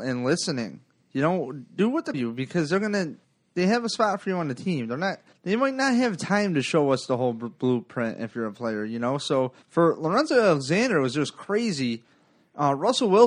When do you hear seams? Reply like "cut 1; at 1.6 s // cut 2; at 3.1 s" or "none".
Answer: cut 1; at 1.0 s // cut 2; at 2.1 s // cut 3; at 3.2 s // cut 4; at 5.3 s // cut 5; at 9.6 s